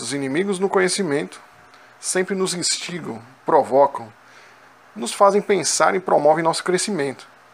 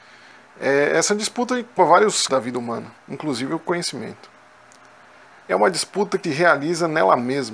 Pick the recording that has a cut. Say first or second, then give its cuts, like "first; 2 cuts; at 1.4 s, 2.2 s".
second; 4 cuts; at 1.8 s, 2.3 s, 3.0 s, 6.2 s